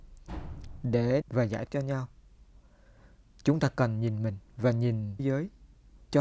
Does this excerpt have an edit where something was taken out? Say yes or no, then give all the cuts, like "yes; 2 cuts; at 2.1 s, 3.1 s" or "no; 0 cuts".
yes; 4 cuts; at 1.2 s, 1.7 s, 4.5 s, 5.2 s